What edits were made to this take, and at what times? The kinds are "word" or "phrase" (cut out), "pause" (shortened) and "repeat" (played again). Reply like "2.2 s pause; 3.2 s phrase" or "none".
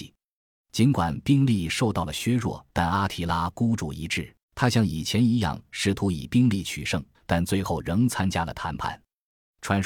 2.7 s pause; 4.4 s pause; 7.1 s pause